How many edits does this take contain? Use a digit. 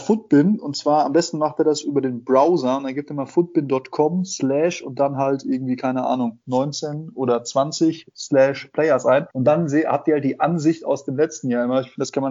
1